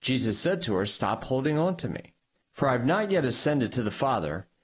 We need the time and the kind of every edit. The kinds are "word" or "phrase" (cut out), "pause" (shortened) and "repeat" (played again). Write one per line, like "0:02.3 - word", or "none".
0:02.4 - pause